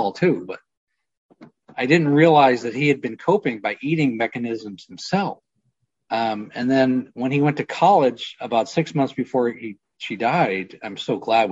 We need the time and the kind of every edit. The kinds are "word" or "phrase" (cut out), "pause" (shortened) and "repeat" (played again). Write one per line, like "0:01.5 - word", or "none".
none